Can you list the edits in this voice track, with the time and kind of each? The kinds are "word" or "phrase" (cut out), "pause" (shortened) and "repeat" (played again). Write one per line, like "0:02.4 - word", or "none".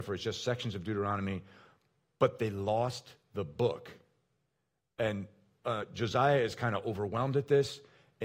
none